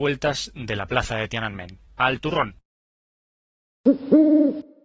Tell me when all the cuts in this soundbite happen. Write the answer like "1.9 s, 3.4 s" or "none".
1.9 s